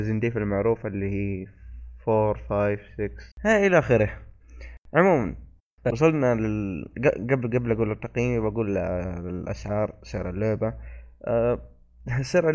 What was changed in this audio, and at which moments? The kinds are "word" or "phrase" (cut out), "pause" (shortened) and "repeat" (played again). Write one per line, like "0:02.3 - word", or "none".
0:03.3 - pause